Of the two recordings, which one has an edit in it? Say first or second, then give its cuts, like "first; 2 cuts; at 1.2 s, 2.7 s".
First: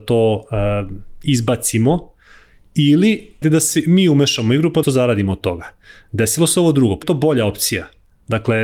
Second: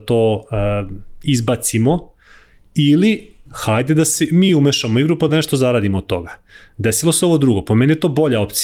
first; 3 cuts; at 3.4 s, 4.8 s, 7.0 s